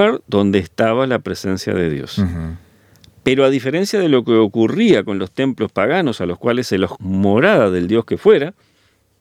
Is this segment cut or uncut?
cut